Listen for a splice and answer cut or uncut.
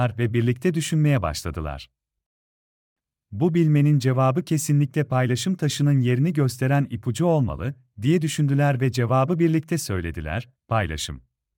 uncut